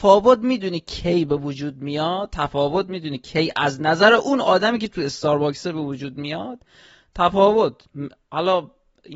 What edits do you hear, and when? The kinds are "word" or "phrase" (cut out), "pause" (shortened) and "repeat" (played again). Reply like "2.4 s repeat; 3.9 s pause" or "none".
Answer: none